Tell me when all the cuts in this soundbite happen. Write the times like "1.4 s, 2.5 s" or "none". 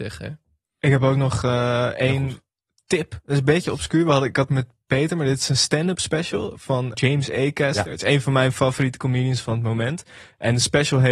4.5 s, 6.9 s